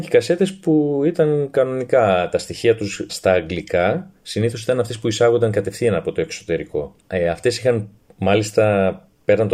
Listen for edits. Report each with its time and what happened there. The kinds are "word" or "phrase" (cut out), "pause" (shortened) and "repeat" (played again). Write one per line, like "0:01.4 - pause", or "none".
0:03.1 - word
0:07.0 - pause